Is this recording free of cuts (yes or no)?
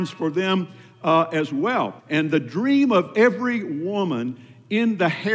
no